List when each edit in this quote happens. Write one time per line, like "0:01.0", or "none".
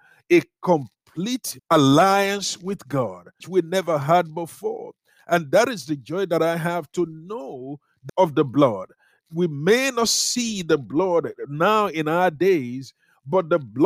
0:01.6
0:03.4
0:08.1